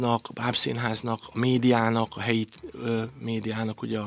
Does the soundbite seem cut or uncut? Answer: uncut